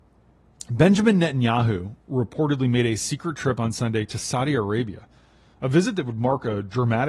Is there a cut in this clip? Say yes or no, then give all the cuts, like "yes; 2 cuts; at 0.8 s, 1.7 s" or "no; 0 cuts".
no; 0 cuts